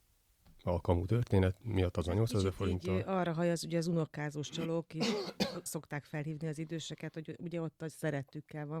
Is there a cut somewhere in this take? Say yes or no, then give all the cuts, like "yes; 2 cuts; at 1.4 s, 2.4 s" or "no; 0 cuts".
yes; 1 cut; at 5.7 s